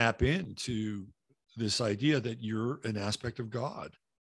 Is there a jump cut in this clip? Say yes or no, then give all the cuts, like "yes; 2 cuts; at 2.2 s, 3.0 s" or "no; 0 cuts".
no; 0 cuts